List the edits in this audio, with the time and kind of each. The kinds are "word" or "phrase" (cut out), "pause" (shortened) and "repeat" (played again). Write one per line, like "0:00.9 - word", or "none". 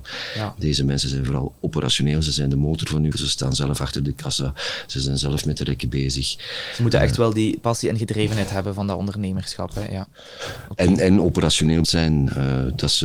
0:03.1 - word
0:11.8 - word